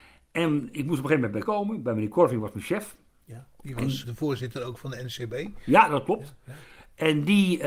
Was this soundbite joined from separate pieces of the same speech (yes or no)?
yes